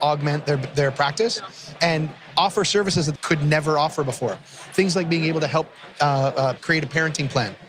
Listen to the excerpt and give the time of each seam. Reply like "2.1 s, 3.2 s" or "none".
3.2 s, 6.6 s

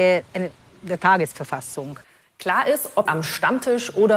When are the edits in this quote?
3.1 s

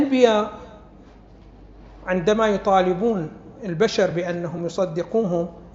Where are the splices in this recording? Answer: none

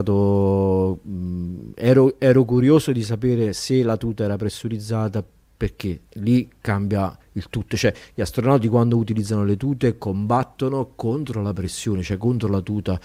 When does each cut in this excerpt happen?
6.1 s, 7.2 s

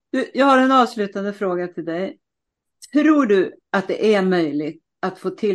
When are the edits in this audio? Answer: none

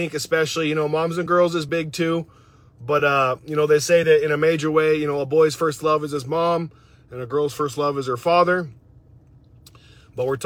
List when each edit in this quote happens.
none

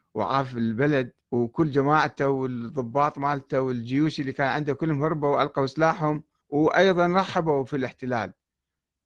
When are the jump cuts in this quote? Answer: 1.2 s, 6.4 s

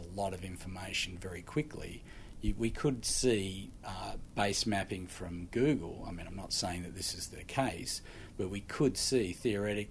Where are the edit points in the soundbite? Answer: none

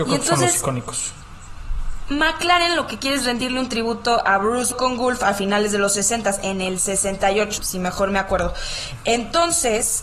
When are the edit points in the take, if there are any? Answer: 4.7 s, 7.6 s

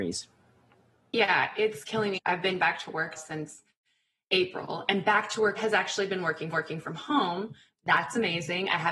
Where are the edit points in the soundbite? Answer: 2.2 s, 3.2 s, 5.6 s, 6.5 s, 7.7 s

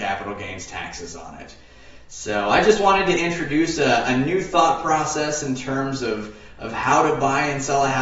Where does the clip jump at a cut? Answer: none

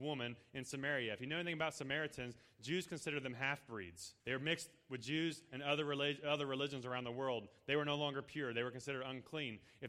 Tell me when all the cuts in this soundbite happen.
4.2 s

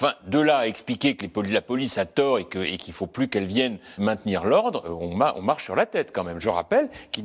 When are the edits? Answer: 4.0 s

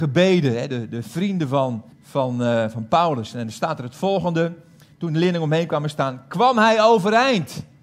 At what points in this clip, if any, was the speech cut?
1.9 s

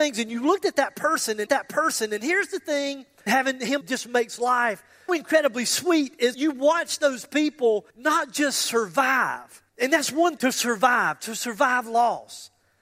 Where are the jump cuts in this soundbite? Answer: 1.5 s, 3.3 s, 3.8 s, 5.1 s, 6.3 s, 7.9 s, 9.7 s, 10.4 s

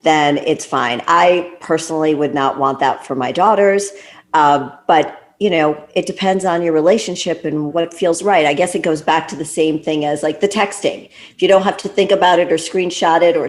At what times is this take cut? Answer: 7.7 s

